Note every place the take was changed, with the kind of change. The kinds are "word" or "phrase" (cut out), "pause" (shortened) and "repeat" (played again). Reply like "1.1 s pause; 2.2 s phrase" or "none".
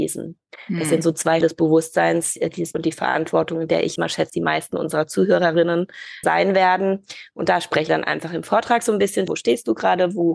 1.4 s word; 2.7 s word; 4.0 s word; 4.3 s word; 6.2 s word; 7.9 s word; 9.3 s word